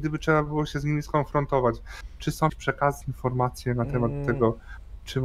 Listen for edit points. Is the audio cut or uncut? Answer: cut